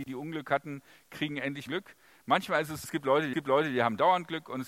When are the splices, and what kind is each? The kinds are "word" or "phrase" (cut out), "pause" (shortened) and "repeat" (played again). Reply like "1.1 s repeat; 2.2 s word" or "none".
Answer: 1.7 s word; 2.8 s word; 3.3 s repeat

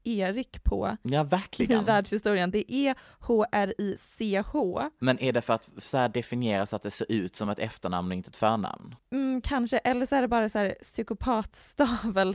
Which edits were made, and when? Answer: none

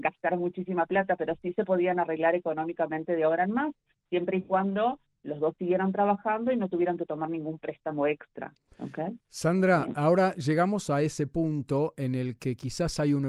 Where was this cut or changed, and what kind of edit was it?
none

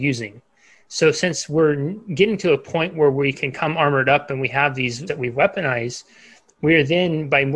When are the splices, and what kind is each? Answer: 5.1 s word

